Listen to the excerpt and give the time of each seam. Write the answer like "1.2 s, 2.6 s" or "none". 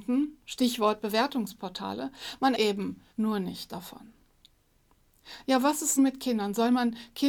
2.5 s, 3.1 s, 6.0 s